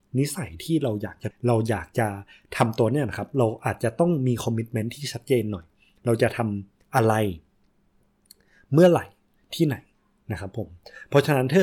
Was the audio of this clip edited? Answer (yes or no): yes